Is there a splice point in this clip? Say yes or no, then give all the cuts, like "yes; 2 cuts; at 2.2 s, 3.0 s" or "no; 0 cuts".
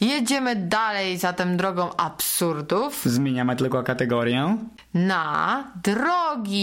no; 0 cuts